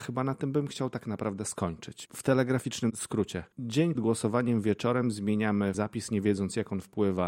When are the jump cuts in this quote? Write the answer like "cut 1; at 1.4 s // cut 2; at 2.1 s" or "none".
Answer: cut 1; at 2.0 s // cut 2; at 3.9 s // cut 3; at 5.7 s

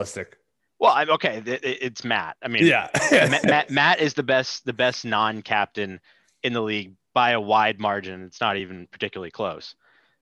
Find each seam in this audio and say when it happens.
none

